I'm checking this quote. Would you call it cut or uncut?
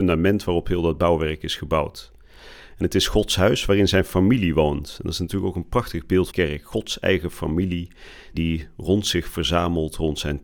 cut